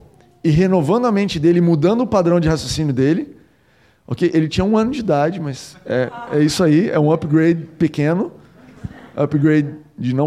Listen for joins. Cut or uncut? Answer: uncut